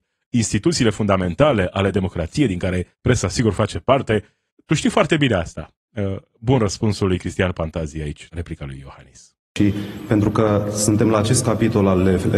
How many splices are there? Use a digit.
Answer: 4